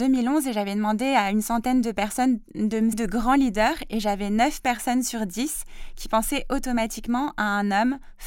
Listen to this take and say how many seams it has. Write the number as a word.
one